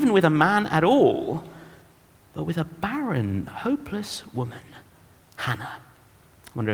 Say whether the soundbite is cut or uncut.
uncut